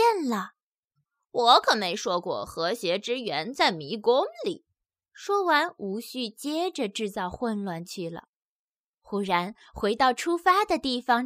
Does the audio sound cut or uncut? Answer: uncut